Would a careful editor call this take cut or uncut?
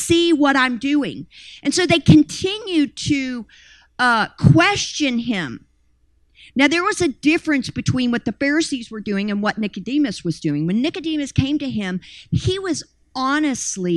uncut